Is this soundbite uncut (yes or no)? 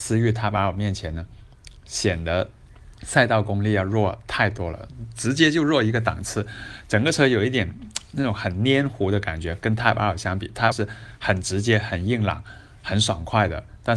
no